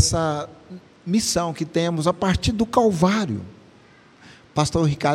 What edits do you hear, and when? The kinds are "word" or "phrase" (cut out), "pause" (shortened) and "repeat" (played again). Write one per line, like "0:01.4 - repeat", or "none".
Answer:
none